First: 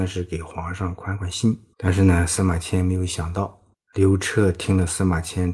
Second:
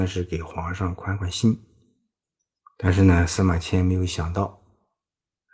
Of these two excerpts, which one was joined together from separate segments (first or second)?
first